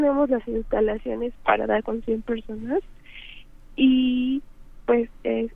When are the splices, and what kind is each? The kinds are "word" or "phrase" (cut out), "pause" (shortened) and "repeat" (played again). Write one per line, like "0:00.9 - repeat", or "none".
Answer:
0:01.4 - word
0:01.8 - word